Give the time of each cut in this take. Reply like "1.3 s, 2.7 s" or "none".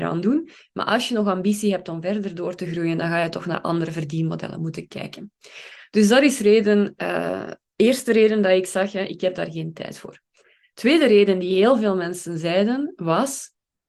none